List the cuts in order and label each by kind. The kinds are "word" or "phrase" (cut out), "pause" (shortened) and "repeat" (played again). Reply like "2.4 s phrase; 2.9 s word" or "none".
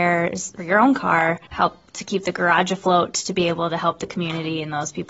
1.5 s pause